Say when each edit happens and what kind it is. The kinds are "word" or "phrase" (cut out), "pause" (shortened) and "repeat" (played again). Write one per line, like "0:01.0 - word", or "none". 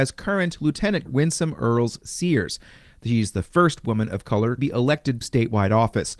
0:01.1 - word
0:04.6 - word
0:05.2 - word